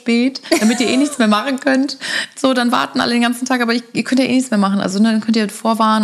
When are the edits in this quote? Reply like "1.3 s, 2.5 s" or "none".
none